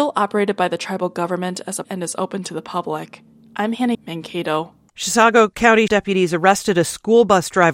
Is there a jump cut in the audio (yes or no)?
yes